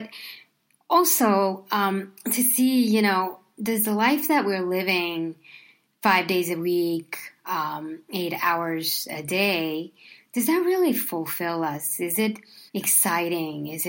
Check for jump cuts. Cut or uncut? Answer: cut